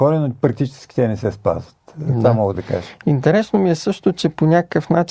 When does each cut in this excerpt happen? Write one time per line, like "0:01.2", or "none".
none